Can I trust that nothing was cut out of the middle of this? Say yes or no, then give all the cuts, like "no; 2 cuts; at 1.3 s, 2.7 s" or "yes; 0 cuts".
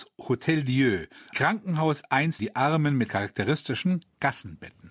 no; 3 cuts; at 1.3 s, 2.4 s, 3.1 s